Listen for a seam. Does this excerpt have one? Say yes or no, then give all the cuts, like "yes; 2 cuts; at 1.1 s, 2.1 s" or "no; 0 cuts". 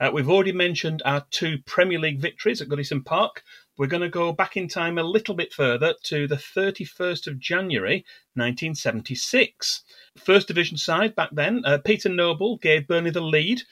yes; 1 cut; at 10.1 s